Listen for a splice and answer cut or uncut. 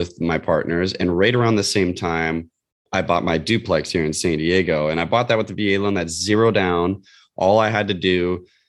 uncut